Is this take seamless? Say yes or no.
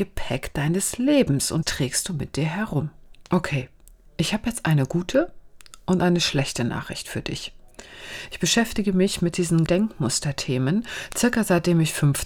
no